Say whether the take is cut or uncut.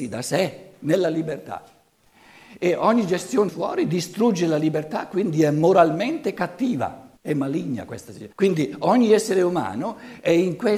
cut